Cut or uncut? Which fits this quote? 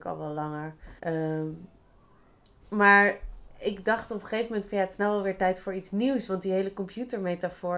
cut